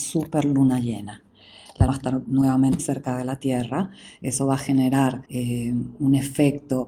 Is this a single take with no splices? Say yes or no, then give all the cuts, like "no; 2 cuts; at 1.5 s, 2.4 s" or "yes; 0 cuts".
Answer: no; 3 cuts; at 1.9 s, 2.8 s, 5.2 s